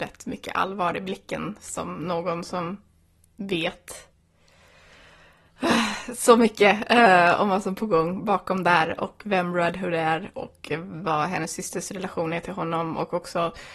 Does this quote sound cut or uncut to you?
uncut